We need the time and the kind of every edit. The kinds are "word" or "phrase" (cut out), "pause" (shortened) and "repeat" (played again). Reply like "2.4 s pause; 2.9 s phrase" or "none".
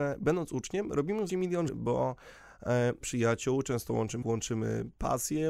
1.3 s word; 1.7 s word; 3.0 s phrase; 4.2 s word